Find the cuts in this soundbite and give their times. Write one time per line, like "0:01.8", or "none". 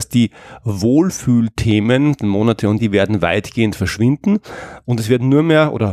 0:02.2
0:02.8